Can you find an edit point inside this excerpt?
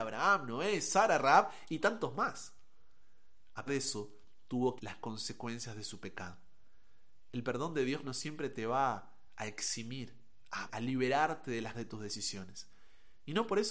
yes; 4 cuts; at 3.7 s, 4.8 s, 10.7 s, 11.7 s

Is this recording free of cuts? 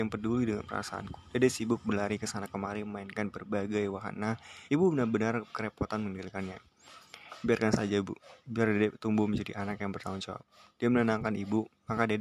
no; 1 cut; at 4.7 s

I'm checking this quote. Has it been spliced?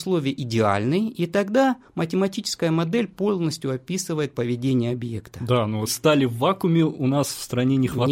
yes; 1 cut; at 5.9 s

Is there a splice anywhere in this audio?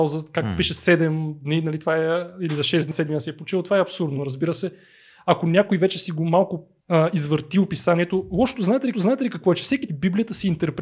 yes; 4 cuts; at 2.9 s, 6.8 s, 8.9 s, 9.9 s

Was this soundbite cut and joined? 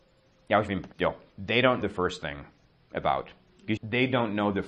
yes; 3 cuts; at 0.9 s, 1.8 s, 3.8 s

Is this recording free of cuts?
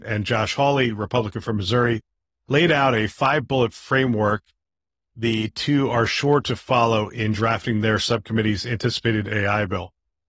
yes; 0 cuts

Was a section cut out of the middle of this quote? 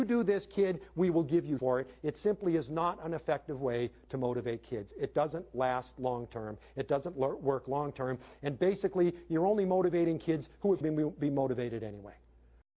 yes; 2 cuts; at 1.6 s, 10.8 s

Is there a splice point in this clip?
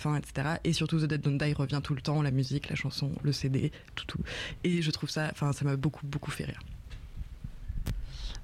yes; 1 cut; at 3.9 s

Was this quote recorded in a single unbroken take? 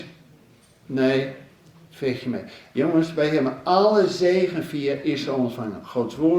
yes; 0 cuts

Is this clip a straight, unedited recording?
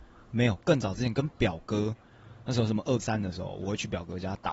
no; 1 cut; at 3.0 s

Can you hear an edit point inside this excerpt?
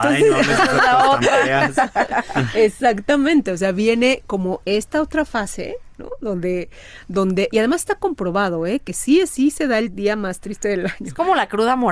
no; 0 cuts

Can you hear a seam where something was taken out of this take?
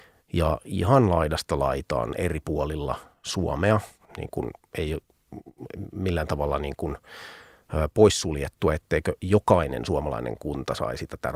no; 0 cuts

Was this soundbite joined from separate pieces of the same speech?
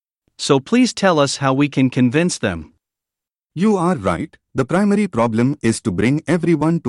no; 0 cuts

